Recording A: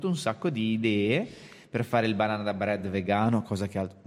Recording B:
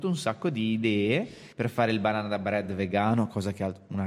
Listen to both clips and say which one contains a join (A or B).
B